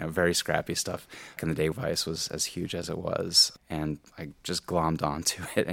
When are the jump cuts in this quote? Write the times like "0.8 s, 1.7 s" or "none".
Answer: 1.4 s, 1.7 s, 4.4 s